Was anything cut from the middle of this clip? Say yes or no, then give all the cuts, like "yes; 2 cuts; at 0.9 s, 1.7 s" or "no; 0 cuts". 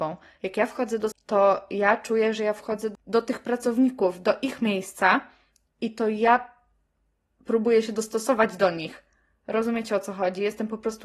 yes; 2 cuts; at 1.1 s, 2.9 s